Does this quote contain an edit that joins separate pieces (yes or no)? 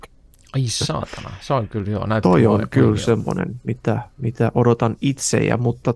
no